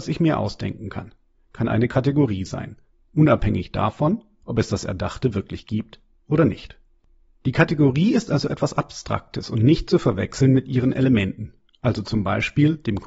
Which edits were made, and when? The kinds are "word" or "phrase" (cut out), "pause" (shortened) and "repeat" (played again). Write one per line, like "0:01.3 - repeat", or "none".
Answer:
none

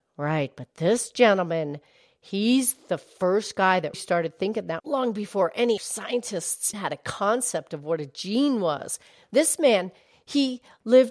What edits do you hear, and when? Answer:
0:03.9 - word
0:04.8 - word
0:05.8 - word
0:06.7 - word

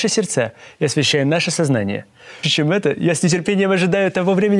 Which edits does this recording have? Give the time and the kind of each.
0:02.4 - phrase

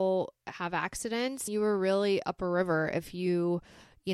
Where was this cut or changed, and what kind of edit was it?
0:01.5 - phrase

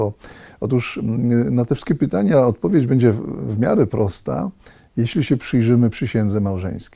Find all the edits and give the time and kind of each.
none

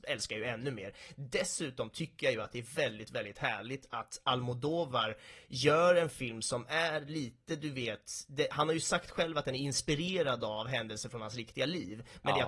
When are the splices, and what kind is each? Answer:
none

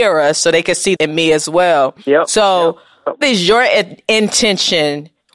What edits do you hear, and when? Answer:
0:01.0 - word
0:02.0 - pause
0:03.2 - word

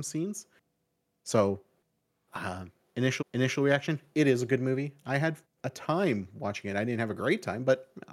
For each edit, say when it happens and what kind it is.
0:03.2 - repeat
0:05.4 - pause

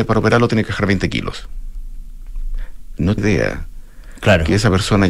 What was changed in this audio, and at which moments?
0:03.2 - word

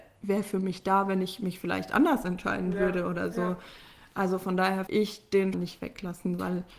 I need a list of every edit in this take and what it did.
0:04.9 - word
0:05.5 - phrase

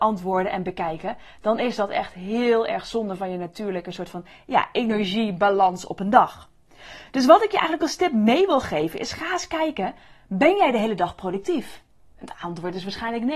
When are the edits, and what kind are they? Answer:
none

